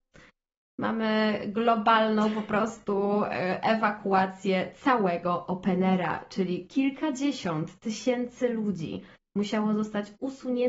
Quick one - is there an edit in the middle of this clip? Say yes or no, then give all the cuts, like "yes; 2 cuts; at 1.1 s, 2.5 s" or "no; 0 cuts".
no; 0 cuts